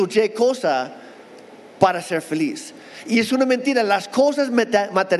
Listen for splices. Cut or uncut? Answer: uncut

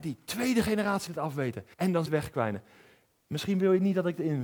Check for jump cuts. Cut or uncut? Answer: cut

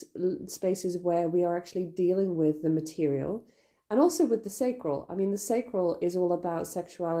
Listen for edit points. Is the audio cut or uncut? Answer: uncut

